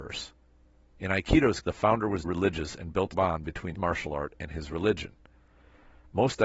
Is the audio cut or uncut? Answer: cut